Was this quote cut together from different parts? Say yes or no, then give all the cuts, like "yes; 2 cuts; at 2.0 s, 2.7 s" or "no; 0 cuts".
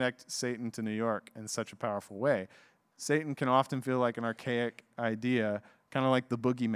no; 0 cuts